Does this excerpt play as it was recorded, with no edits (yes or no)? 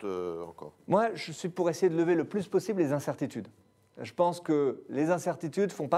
yes